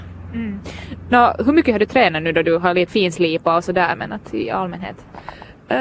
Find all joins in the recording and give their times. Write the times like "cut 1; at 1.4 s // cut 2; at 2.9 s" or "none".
cut 1; at 2.9 s